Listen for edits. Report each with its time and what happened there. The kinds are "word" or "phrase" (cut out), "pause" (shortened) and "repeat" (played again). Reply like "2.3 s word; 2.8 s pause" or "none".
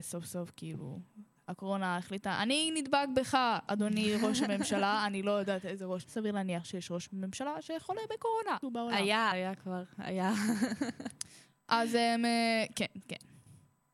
6.1 s word; 8.6 s word; 9.3 s word